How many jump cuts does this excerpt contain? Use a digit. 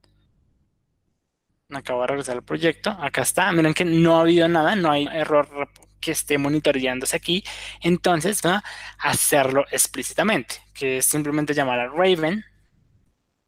3